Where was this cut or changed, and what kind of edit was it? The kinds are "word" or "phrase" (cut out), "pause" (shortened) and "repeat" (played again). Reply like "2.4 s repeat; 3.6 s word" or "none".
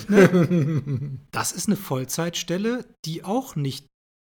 1.3 s pause; 3.2 s word